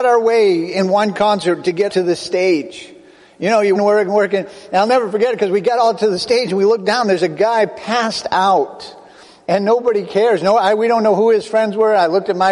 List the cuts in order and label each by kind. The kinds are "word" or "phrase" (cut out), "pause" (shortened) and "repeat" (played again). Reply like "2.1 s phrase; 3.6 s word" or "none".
1.9 s word; 3.8 s word